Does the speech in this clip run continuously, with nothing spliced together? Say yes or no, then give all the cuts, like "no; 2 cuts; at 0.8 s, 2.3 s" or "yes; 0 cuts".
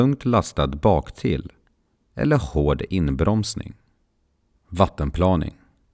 yes; 0 cuts